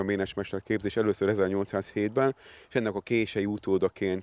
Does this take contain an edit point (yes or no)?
no